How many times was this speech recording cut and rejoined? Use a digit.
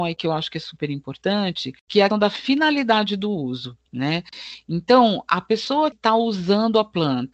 3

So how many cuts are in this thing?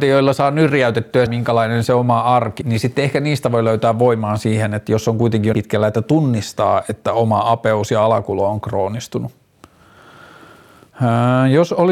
3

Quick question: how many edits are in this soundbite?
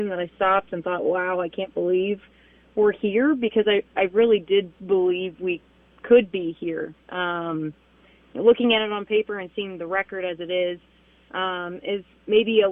1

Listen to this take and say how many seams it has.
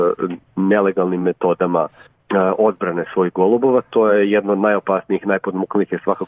0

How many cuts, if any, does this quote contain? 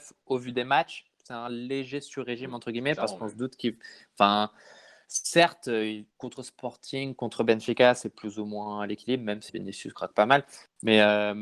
2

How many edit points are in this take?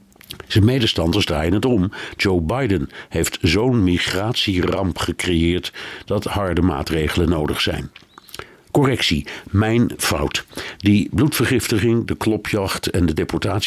0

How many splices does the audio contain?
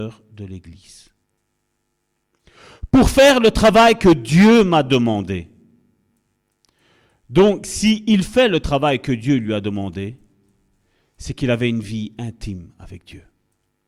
0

